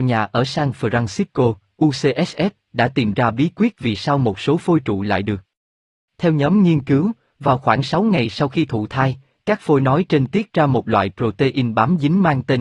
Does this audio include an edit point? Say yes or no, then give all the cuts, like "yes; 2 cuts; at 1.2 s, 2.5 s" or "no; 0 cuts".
no; 0 cuts